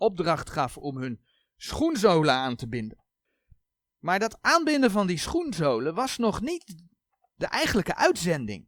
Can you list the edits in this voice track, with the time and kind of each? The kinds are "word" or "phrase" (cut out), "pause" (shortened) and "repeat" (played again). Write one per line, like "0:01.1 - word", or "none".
none